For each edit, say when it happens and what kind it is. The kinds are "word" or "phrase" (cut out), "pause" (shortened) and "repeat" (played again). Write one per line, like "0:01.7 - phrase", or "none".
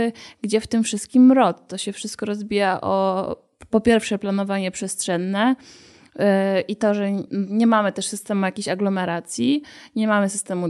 0:07.3 - word